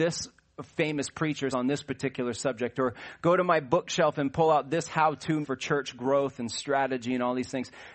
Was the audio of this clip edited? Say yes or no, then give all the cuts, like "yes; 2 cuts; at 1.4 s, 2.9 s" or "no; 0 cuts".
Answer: yes; 2 cuts; at 1.5 s, 5.4 s